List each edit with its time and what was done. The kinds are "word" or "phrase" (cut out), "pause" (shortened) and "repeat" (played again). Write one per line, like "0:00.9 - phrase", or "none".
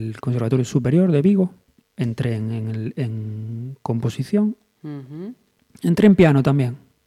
none